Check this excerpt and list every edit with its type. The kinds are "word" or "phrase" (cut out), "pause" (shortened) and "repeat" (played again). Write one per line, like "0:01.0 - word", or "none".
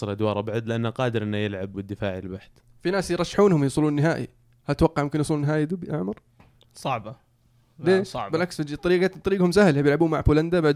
0:01.7 - word